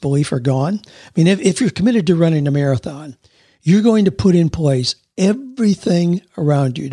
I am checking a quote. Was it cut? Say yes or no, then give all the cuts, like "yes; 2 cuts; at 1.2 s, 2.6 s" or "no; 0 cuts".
no; 0 cuts